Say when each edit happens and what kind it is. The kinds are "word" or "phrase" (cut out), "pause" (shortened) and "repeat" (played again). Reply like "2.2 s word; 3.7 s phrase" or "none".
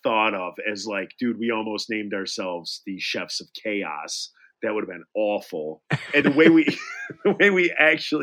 6.2 s word